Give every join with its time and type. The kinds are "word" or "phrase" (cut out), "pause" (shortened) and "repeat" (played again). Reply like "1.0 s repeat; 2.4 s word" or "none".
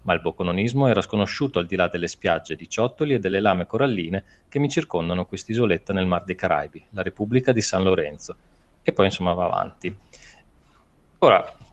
none